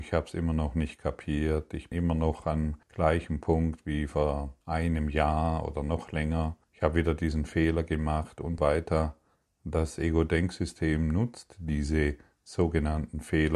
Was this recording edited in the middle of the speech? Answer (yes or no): yes